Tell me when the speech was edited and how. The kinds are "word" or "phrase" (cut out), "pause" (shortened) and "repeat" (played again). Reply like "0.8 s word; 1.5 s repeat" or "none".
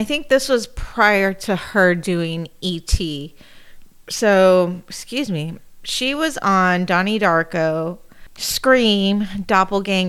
none